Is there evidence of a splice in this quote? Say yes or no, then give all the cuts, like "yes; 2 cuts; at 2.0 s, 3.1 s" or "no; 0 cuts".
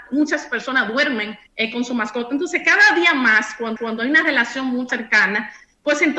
yes; 3 cuts; at 1.5 s, 3.8 s, 4.9 s